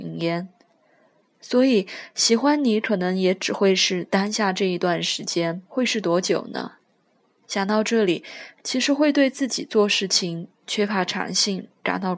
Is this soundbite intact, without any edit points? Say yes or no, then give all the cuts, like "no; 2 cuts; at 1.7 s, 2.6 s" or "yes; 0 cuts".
no; 1 cut; at 5.7 s